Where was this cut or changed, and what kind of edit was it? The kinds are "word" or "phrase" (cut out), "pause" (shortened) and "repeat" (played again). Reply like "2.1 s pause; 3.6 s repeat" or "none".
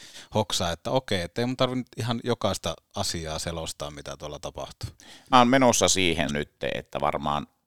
5.3 s word; 6.3 s word